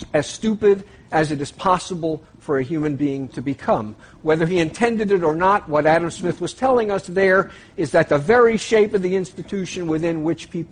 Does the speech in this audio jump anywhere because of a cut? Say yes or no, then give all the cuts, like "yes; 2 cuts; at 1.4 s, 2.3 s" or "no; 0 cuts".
no; 0 cuts